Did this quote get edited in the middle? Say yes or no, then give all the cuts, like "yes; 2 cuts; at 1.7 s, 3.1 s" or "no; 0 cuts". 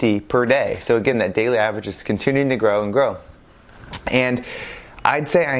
no; 0 cuts